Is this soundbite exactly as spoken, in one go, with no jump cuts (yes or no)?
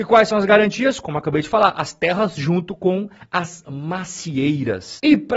yes